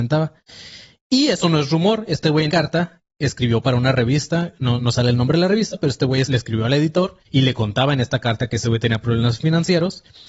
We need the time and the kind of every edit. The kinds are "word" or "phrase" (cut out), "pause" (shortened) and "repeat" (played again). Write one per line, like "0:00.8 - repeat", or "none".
0:02.5 - word
0:04.8 - word
0:06.2 - word
0:07.2 - pause